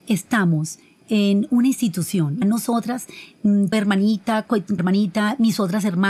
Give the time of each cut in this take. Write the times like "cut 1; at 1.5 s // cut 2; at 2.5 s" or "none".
cut 1; at 2.4 s // cut 2; at 3.7 s // cut 3; at 4.8 s